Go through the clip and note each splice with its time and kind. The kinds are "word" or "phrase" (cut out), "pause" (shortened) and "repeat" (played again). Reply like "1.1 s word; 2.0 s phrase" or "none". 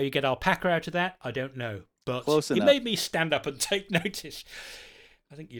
none